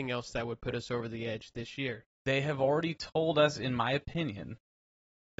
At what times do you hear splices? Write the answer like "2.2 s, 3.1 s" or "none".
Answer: 2.1 s